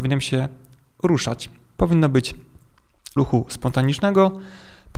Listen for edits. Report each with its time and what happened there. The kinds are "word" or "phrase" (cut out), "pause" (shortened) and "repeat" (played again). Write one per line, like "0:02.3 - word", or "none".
0:03.2 - word